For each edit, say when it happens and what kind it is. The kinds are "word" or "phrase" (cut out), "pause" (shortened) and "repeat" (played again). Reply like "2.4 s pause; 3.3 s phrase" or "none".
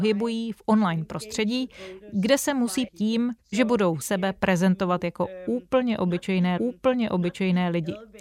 2.9 s phrase; 3.4 s pause; 4.0 s word; 6.6 s repeat